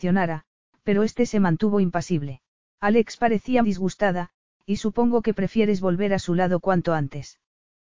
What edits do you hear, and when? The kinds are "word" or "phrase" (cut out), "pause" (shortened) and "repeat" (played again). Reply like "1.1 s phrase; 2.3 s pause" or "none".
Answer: 2.6 s pause; 3.6 s word